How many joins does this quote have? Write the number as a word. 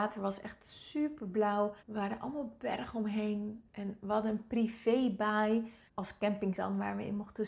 three